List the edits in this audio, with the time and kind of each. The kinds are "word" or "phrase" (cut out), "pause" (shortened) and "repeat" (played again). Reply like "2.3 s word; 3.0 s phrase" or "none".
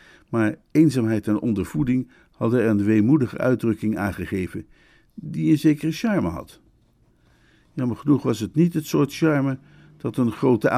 none